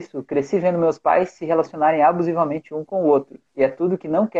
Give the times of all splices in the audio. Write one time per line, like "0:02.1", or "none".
0:03.5